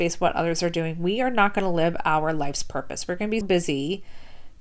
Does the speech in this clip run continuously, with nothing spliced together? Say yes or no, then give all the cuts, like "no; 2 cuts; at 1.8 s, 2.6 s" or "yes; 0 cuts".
no; 1 cut; at 3.4 s